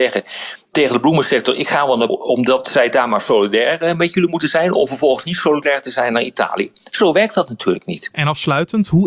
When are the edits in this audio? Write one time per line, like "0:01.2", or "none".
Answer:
0:02.1